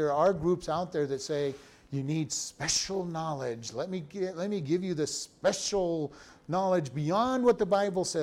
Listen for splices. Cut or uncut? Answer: uncut